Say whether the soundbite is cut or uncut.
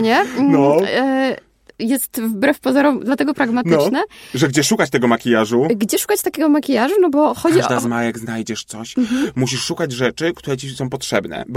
uncut